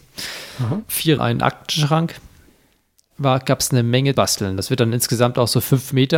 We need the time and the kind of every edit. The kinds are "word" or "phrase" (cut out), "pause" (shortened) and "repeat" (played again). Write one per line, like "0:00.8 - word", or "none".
0:01.2 - phrase
0:04.2 - word